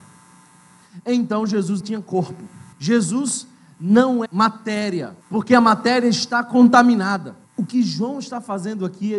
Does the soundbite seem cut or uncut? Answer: cut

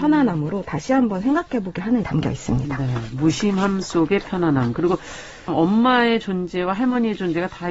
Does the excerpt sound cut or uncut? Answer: cut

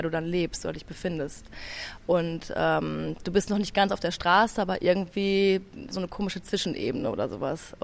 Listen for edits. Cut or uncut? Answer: cut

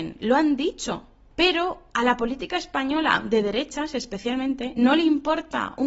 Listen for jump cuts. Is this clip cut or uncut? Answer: uncut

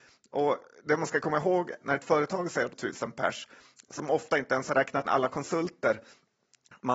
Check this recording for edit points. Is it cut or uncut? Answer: cut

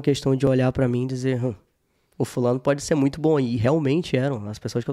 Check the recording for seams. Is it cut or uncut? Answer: uncut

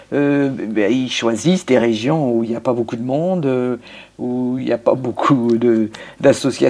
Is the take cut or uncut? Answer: uncut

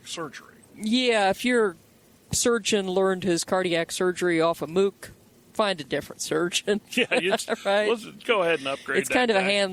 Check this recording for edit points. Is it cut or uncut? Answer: uncut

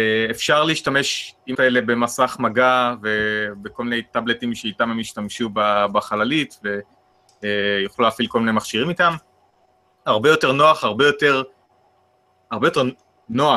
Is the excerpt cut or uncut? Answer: cut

